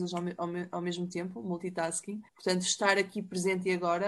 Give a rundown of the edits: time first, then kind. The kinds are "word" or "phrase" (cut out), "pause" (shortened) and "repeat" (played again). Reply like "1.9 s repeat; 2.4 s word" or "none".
2.3 s pause